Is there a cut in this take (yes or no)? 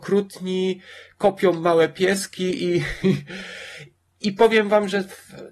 no